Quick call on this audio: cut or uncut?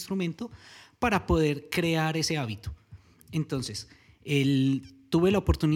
uncut